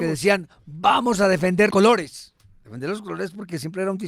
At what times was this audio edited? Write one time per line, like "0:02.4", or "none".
0:01.7